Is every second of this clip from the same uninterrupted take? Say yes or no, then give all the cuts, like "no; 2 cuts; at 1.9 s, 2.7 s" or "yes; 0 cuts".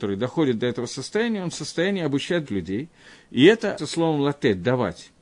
no; 2 cuts; at 2.5 s, 3.8 s